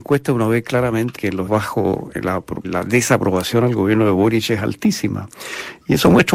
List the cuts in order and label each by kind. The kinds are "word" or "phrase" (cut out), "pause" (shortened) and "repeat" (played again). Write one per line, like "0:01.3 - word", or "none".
0:01.2 - word
0:01.5 - word
0:02.6 - word